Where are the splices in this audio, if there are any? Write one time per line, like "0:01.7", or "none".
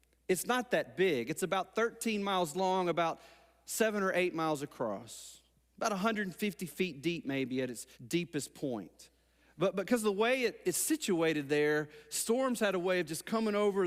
0:07.9